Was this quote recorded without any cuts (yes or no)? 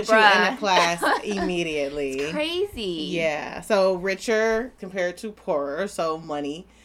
no